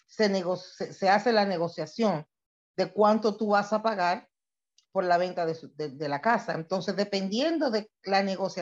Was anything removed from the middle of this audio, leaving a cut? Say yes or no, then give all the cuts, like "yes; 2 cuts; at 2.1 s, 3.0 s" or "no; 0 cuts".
no; 0 cuts